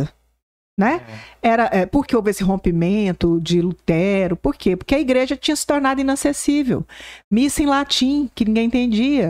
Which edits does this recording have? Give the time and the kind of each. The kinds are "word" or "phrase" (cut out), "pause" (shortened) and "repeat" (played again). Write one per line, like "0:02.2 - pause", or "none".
0:02.1 - word